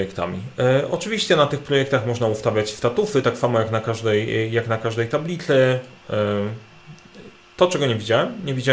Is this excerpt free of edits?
yes; 0 cuts

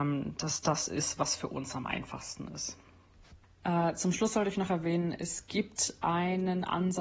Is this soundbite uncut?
yes; 0 cuts

